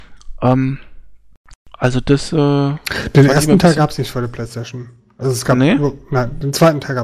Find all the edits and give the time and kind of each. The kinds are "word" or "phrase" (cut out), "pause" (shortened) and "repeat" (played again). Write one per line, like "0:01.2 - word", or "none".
none